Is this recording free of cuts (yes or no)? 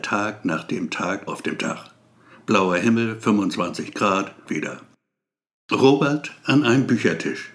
no